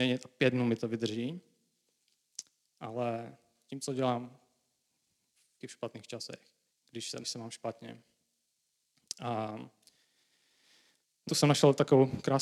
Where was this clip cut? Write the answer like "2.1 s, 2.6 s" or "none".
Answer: 5.6 s, 6.7 s, 7.2 s, 11.3 s